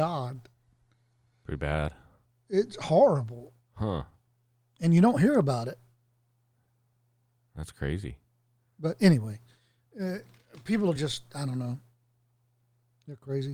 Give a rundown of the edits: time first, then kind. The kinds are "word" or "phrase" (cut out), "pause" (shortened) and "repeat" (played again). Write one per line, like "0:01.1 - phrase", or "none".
none